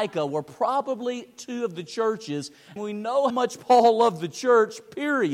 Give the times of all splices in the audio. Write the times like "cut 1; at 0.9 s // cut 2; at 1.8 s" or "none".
cut 1; at 2.8 s // cut 2; at 3.3 s